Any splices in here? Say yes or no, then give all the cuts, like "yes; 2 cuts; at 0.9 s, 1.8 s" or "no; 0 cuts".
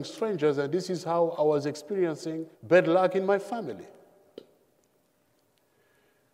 yes; 1 cut; at 2.5 s